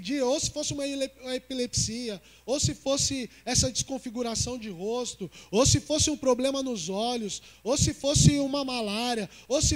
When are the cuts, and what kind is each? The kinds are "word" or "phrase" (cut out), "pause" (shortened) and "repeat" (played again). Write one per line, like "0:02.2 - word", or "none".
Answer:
none